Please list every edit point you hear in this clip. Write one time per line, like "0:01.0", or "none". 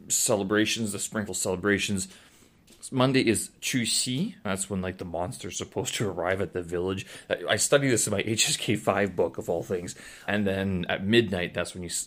0:01.3
0:04.4
0:10.3